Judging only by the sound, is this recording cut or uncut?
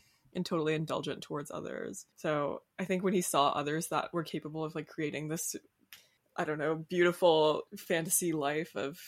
cut